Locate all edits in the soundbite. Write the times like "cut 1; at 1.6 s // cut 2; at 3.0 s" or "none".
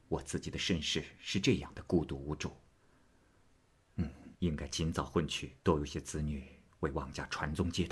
cut 1; at 4.3 s // cut 2; at 5.6 s